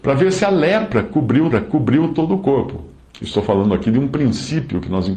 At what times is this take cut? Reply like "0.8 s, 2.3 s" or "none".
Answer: 1.5 s, 3.0 s